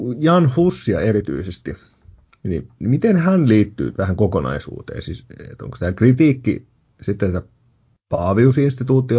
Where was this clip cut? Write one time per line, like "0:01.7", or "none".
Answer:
0:02.8
0:03.9
0:05.8